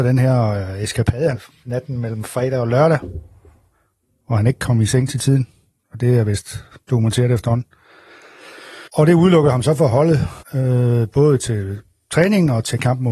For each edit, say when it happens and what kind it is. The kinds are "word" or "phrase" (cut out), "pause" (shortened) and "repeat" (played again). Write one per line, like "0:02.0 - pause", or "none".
0:01.3 - word
0:08.9 - pause
0:10.4 - pause